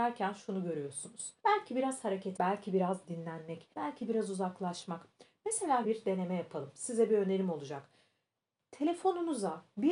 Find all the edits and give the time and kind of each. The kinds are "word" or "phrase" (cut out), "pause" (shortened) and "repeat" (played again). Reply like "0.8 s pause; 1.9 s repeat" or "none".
1.4 s pause; 2.4 s word; 3.7 s pause; 5.8 s phrase